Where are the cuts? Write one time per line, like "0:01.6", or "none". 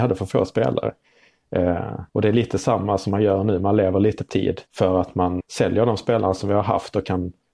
0:02.1
0:04.3
0:04.7
0:05.4